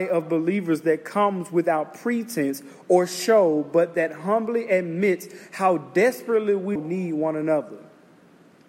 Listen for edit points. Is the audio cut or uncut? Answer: cut